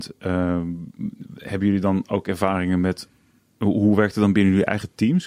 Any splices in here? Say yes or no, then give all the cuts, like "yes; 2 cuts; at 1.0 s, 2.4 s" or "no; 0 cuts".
no; 0 cuts